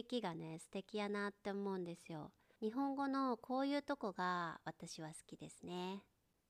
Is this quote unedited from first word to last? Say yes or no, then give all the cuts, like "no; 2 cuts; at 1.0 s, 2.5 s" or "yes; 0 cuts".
yes; 0 cuts